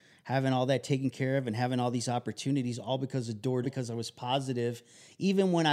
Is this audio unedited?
no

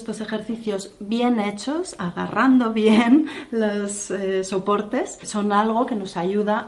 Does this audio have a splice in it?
no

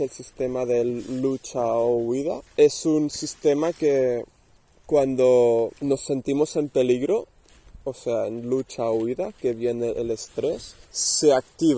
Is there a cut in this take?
yes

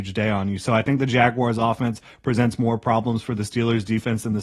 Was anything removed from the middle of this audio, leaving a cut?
no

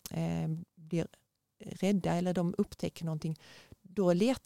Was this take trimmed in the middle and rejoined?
no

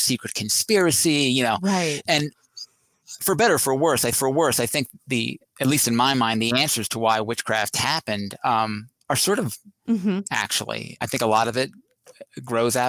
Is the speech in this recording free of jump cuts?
no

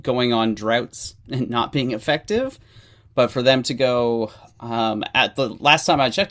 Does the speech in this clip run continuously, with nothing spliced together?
yes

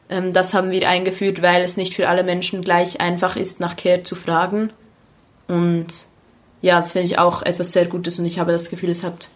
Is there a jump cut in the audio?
no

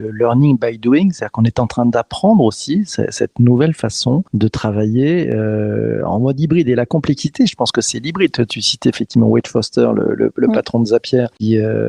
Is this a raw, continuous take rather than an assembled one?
yes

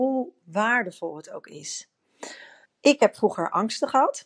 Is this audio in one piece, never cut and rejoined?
yes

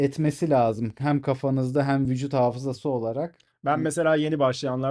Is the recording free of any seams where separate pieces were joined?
yes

